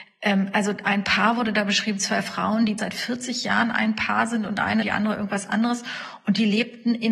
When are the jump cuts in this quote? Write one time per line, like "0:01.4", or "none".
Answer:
0:02.8
0:04.8